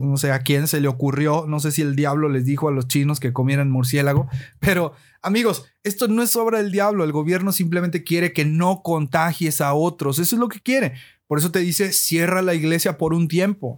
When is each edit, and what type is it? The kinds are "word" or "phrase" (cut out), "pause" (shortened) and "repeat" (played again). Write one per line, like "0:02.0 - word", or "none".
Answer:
none